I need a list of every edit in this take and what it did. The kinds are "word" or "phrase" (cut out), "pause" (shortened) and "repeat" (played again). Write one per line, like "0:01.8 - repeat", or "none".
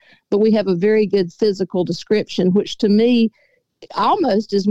none

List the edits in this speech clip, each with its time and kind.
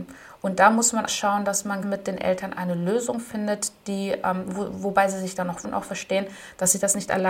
0:01.1 - word
0:01.8 - word
0:05.6 - word

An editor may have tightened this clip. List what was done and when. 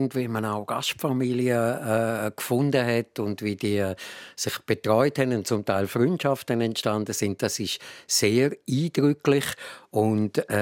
none

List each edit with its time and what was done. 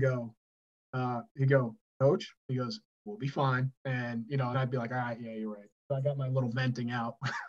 0:02.4 - pause
0:03.8 - pause
0:04.5 - word

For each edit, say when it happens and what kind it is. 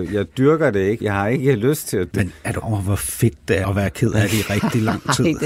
0:01.0 - word
0:02.1 - word
0:02.6 - word
0:03.6 - word

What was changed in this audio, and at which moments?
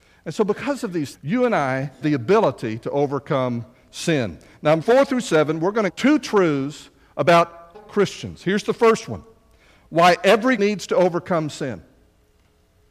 0:01.1 - word
0:02.0 - word
0:04.8 - word
0:05.9 - word
0:07.7 - word
0:10.6 - word

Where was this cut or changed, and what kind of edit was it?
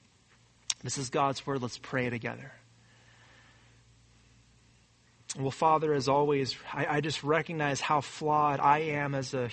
none

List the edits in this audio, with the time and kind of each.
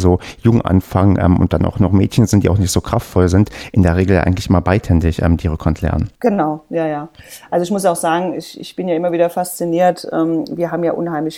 0:06.2 - pause

